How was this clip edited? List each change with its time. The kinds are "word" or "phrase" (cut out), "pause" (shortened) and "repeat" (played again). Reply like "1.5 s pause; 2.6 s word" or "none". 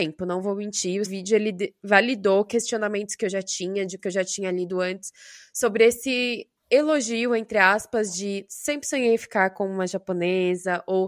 1.1 s word; 4.0 s word